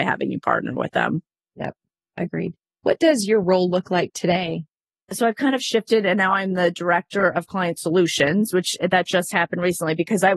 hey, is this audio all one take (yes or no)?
yes